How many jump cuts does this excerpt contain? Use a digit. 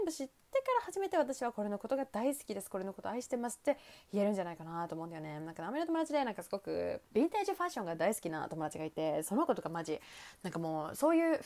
1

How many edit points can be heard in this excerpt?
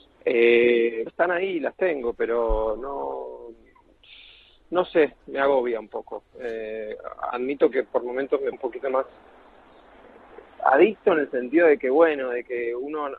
3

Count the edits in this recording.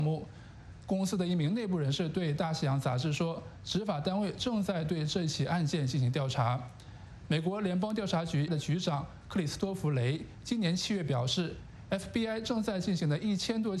1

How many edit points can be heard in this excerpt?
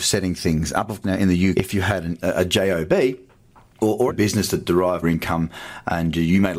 5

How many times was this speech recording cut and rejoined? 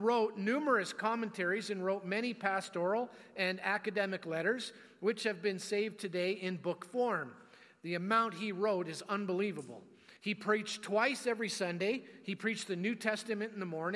1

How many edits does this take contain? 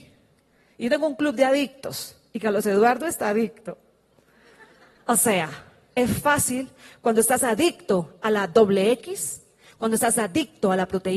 0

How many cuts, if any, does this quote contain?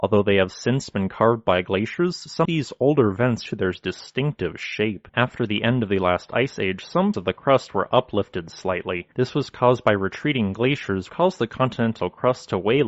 6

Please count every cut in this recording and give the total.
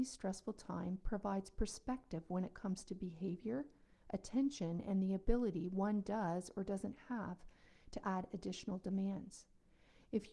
0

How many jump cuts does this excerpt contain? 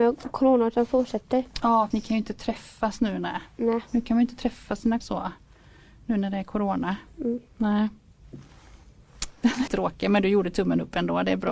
3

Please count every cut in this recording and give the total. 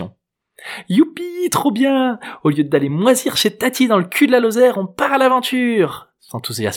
0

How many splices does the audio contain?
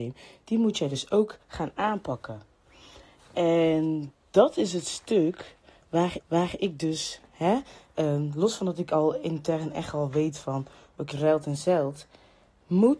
3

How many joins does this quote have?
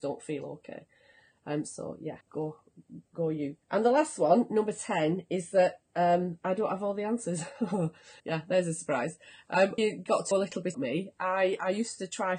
7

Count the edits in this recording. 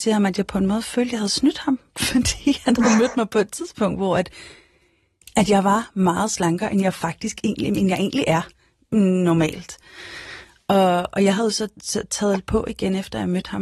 0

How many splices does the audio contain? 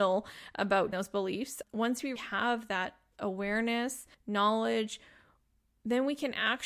4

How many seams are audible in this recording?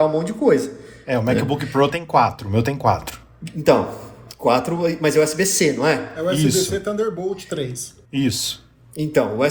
1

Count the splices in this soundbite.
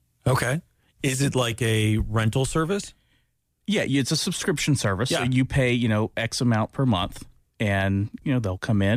0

